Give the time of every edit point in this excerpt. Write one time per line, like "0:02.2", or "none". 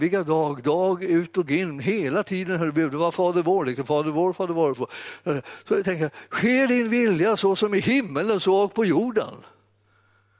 0:01.5